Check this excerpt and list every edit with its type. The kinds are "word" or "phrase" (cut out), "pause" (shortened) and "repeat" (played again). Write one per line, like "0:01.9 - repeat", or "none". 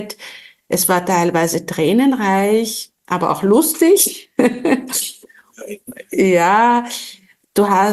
none